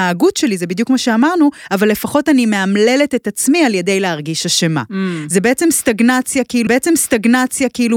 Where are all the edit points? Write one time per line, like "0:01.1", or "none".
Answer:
0:06.7